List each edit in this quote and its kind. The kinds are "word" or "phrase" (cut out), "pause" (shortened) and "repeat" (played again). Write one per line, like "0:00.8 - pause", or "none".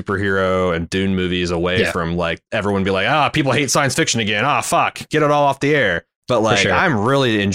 0:06.2 - pause

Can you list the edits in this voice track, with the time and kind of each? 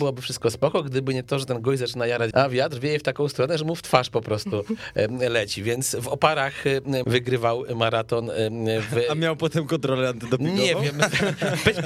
0:02.3 - word
0:07.0 - word

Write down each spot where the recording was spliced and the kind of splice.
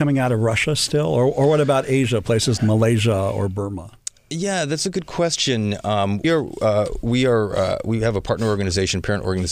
0:02.6 - word
0:06.2 - word

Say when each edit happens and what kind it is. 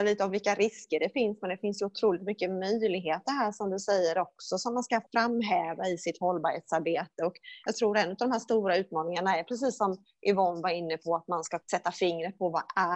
0:05.1 - pause
0:11.6 - pause

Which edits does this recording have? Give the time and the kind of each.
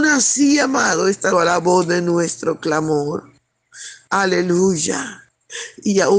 0:01.3 - word

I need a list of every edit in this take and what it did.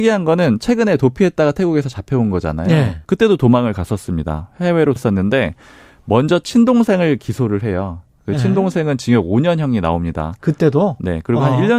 0:03.0 - pause
0:05.0 - word

